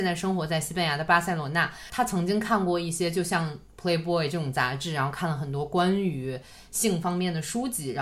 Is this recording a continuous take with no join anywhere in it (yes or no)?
yes